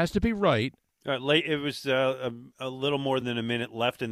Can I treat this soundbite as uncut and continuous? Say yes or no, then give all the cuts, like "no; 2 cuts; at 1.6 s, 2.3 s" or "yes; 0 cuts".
yes; 0 cuts